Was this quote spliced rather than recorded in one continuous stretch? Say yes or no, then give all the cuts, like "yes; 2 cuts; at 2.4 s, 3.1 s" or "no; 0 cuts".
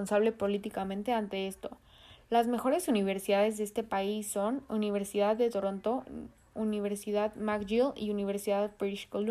no; 0 cuts